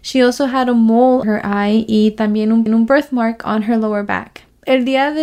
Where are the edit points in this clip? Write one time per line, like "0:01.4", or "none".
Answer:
0:01.2
0:02.7